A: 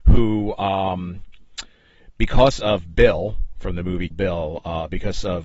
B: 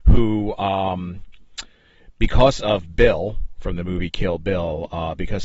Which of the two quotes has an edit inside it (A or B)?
A